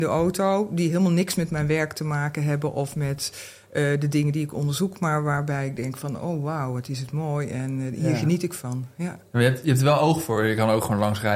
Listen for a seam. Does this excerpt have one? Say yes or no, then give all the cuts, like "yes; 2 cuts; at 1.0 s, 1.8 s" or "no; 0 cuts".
no; 0 cuts